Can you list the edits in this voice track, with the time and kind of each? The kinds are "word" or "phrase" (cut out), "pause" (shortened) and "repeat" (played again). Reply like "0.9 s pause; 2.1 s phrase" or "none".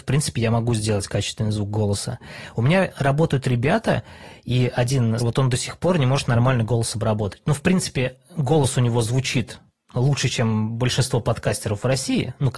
5.2 s word